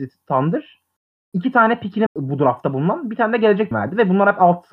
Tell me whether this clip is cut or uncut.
cut